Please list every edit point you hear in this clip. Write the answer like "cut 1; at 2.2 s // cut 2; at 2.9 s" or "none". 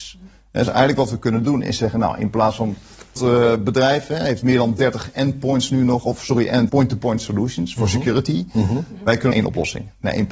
cut 1; at 3.2 s // cut 2; at 6.7 s // cut 3; at 9.3 s